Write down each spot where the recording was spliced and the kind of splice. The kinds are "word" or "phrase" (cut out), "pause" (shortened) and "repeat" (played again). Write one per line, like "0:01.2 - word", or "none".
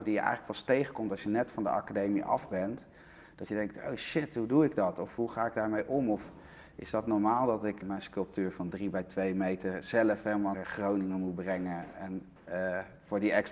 0:07.8 - word
0:10.5 - word
0:12.4 - pause